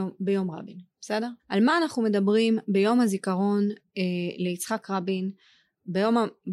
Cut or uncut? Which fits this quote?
cut